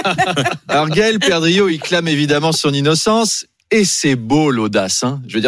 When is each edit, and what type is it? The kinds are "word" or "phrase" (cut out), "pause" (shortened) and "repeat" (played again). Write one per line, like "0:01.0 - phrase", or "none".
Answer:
none